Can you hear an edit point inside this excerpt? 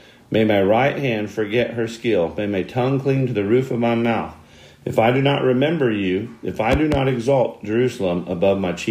no; 0 cuts

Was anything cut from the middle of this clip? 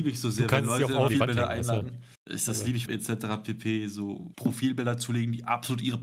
yes; 4 cuts; at 1.1 s, 2.1 s, 2.9 s, 4.3 s

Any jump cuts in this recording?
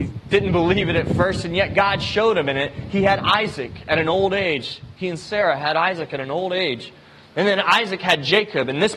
no; 0 cuts

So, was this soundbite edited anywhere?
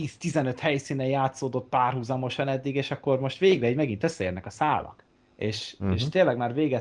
no; 0 cuts

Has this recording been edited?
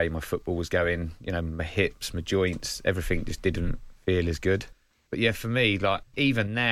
no; 0 cuts

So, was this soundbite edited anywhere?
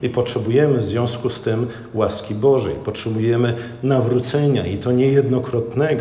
no; 0 cuts

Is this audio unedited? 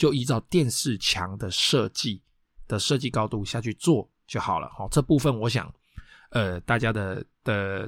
yes; 0 cuts

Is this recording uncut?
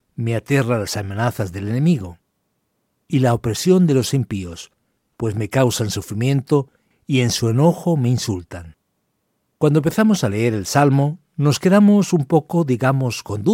yes; 0 cuts

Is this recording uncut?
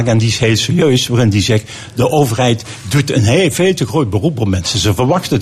yes; 0 cuts

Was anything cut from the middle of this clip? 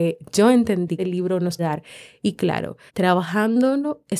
yes; 3 cuts; at 1.0 s, 1.6 s, 2.9 s

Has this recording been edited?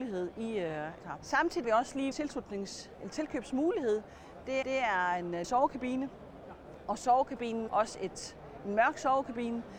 yes; 6 cuts; at 1.0 s, 1.6 s, 2.1 s, 4.6 s, 5.4 s, 7.7 s

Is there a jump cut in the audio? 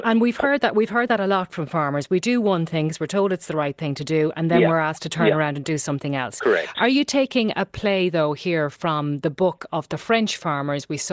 no; 0 cuts

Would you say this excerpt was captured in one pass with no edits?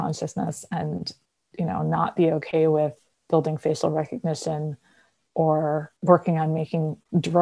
yes; 0 cuts

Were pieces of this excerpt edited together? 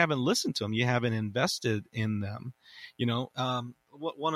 no; 0 cuts

